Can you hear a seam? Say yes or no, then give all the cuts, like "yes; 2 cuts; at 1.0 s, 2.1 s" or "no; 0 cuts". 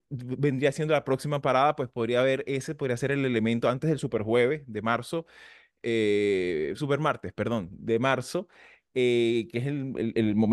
no; 0 cuts